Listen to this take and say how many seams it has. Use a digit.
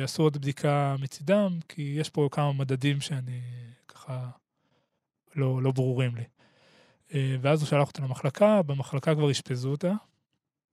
0